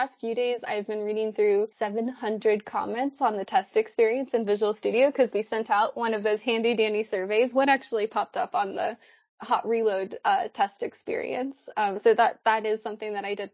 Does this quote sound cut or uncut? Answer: cut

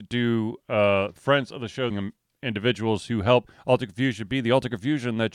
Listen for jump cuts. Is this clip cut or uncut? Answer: cut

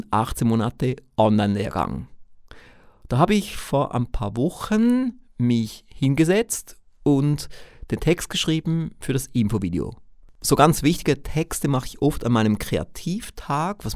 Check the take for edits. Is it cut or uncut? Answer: uncut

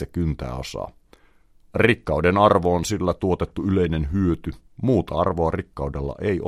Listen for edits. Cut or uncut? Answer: cut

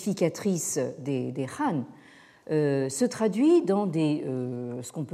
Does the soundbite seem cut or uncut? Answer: uncut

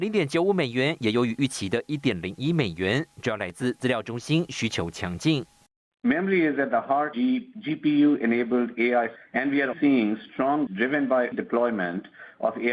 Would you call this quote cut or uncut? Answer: cut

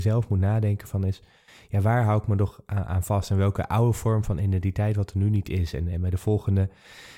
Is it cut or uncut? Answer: uncut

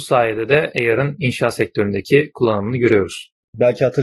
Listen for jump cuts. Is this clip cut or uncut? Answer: uncut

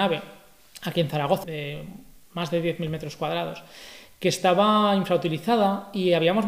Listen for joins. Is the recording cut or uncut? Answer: cut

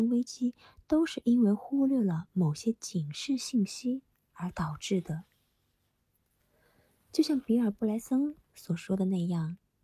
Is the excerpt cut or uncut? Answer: uncut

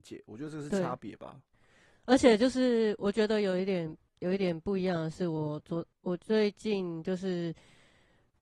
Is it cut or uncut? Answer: uncut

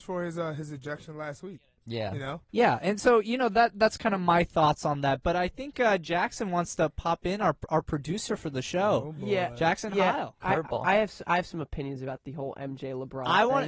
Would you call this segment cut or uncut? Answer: cut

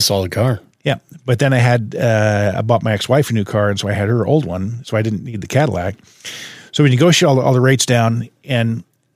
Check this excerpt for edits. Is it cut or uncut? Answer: uncut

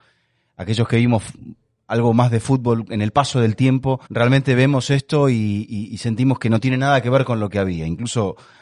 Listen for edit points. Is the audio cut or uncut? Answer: cut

